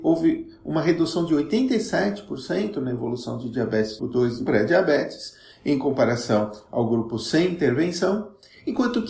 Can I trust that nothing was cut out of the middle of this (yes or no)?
no